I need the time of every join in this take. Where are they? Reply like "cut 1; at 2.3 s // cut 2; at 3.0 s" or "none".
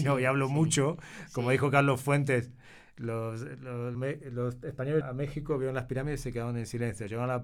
cut 1; at 3.9 s // cut 2; at 5.0 s